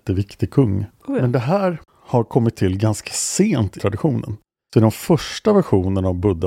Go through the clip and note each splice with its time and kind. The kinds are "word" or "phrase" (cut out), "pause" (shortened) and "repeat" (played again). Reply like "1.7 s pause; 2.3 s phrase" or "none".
0.9 s pause; 1.9 s phrase; 3.8 s phrase